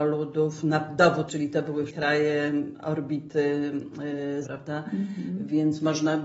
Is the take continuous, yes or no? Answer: no